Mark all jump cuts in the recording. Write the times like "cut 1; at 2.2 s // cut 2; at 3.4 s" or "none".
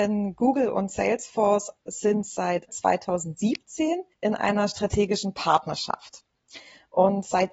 cut 1; at 2.7 s // cut 2; at 4.1 s